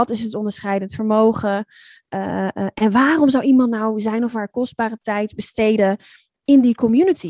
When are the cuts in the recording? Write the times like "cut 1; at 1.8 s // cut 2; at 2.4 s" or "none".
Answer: none